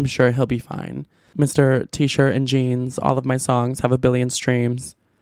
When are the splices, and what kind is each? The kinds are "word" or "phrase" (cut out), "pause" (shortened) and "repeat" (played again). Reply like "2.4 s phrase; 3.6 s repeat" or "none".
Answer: none